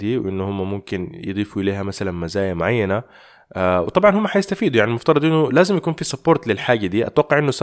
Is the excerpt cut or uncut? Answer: uncut